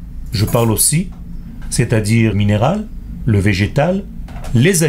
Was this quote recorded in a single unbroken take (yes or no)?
no